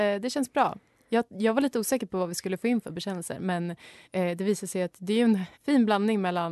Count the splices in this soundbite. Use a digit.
2